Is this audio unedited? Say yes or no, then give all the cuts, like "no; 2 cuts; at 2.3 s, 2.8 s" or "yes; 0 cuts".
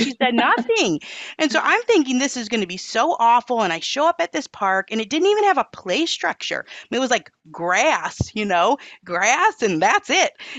yes; 0 cuts